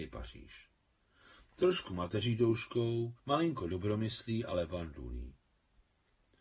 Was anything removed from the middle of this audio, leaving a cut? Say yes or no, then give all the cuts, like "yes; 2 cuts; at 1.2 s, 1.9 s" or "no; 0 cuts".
yes; 1 cut; at 3.2 s